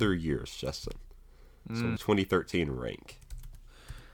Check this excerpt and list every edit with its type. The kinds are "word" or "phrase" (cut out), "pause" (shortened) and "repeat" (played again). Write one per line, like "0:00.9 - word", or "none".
0:02.0 - phrase